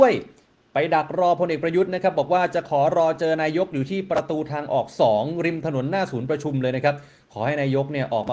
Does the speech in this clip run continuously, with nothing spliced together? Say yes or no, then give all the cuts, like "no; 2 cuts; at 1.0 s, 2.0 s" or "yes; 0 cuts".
yes; 0 cuts